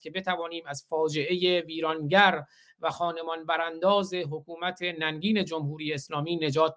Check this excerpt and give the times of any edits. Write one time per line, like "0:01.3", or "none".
none